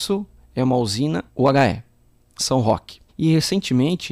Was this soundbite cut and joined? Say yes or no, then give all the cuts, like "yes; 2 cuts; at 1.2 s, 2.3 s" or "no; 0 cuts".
yes; 3 cuts; at 1.3 s, 2.4 s, 3.1 s